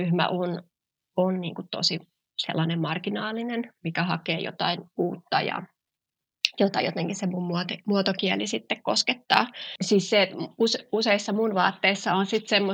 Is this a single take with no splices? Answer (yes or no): yes